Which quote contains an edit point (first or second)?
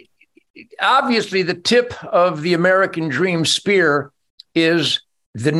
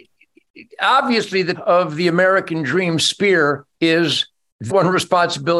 second